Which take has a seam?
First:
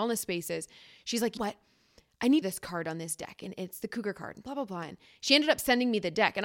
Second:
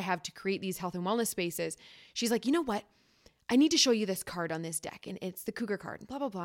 first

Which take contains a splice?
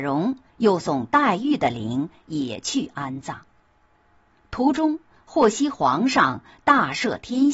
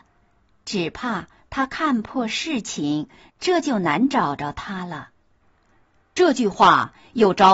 second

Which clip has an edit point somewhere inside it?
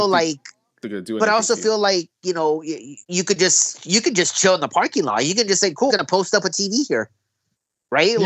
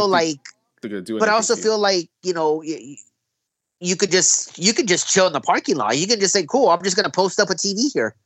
first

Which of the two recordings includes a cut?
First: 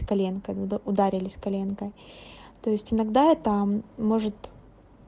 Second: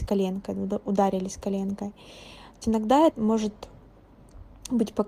second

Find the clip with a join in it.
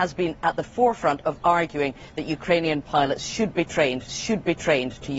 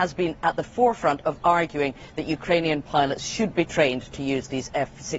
first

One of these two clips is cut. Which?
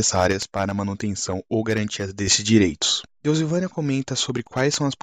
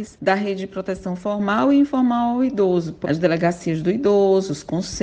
second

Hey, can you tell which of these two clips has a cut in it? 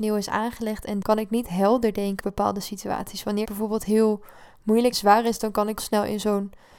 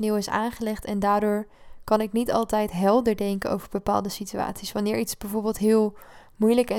first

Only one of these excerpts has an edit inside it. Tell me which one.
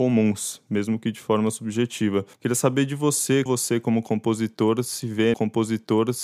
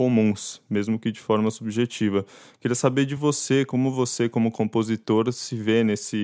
first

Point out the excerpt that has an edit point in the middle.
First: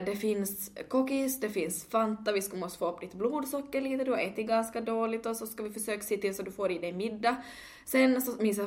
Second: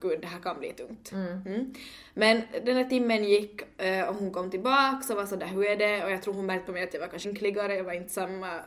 second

